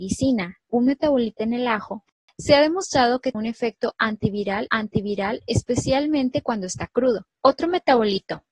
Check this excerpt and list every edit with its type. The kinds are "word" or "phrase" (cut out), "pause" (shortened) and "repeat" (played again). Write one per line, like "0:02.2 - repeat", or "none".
0:01.4 - word
0:03.3 - word
0:04.7 - repeat
0:07.4 - pause